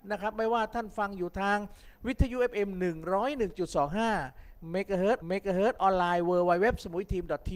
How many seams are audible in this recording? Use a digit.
1